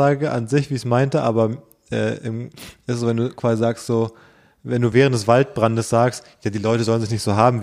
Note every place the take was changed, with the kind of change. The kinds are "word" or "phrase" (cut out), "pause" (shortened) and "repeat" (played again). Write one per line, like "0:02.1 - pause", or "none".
none